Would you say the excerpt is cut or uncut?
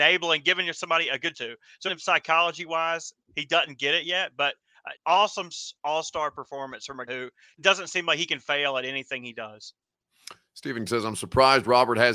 cut